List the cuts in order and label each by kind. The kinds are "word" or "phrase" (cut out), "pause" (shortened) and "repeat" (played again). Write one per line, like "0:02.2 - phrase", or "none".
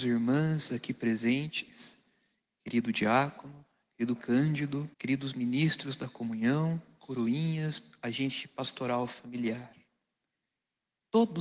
0:04.2 - word
0:04.9 - pause
0:07.0 - word